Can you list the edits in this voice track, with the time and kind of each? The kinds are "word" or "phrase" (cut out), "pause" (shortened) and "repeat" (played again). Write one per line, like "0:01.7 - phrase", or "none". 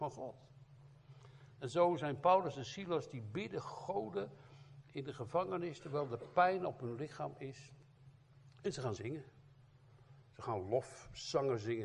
0:09.0 - word